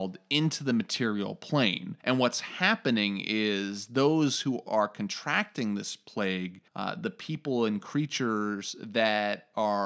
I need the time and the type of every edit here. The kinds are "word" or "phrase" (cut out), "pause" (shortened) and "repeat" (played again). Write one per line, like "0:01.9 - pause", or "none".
0:02.0 - pause
0:06.7 - pause